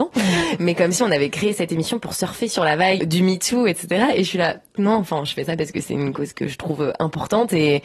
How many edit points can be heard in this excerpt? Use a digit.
2